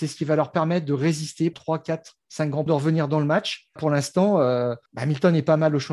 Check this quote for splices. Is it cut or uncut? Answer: cut